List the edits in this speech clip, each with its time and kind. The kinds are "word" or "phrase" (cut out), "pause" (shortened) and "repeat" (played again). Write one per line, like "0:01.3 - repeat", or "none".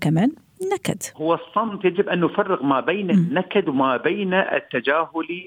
0:01.1 - pause